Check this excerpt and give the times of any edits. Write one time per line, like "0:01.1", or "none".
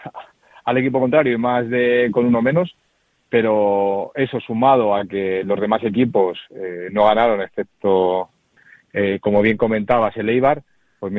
none